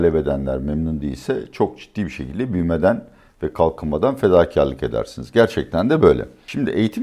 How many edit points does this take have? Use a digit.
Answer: 0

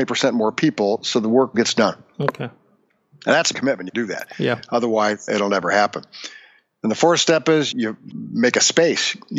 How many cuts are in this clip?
6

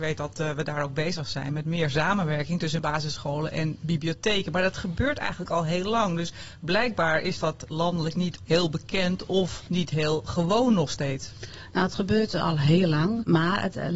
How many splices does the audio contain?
0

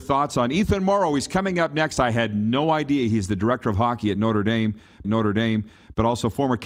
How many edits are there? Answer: 1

